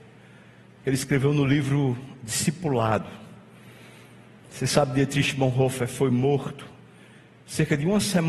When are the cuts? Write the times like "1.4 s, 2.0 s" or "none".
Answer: none